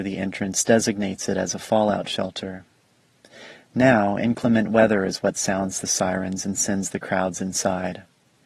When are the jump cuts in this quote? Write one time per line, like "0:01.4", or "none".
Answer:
none